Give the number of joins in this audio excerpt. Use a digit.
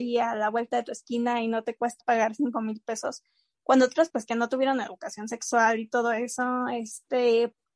2